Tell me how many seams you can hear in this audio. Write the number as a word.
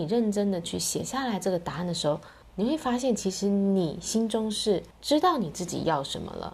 two